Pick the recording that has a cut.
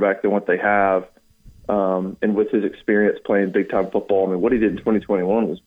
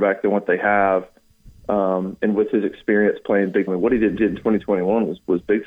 second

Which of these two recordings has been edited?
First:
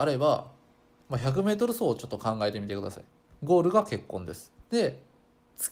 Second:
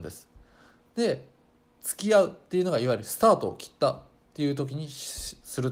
first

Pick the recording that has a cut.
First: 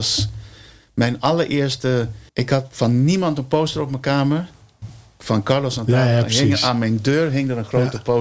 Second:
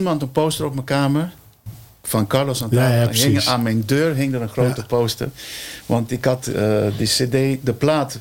first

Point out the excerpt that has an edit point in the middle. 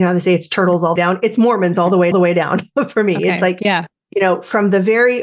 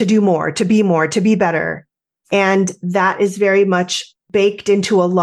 first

